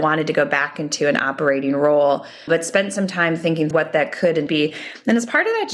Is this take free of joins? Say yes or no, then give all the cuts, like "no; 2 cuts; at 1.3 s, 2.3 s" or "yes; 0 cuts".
no; 3 cuts; at 2.5 s, 3.7 s, 4.5 s